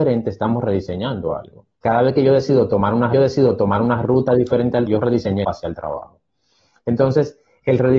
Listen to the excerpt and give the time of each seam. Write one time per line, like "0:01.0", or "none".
0:01.7
0:03.1
0:04.9
0:05.4